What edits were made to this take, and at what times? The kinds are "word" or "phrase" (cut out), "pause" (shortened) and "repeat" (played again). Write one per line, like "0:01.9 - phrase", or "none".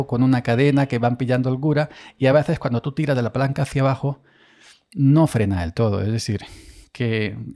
none